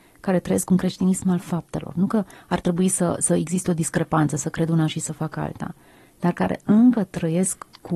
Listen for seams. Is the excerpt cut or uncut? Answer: uncut